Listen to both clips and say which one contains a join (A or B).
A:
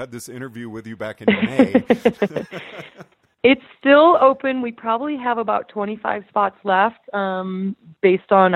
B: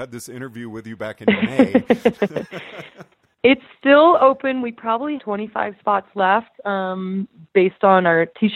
B